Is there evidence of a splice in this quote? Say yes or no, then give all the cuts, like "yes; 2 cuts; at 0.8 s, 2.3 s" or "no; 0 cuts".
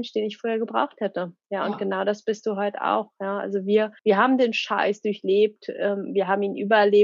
yes; 1 cut; at 4.0 s